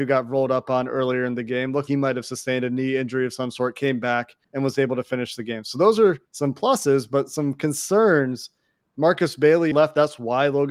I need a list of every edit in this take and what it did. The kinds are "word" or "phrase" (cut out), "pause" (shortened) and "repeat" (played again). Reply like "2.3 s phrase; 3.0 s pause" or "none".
1.9 s word; 4.4 s pause; 6.3 s pause; 9.7 s word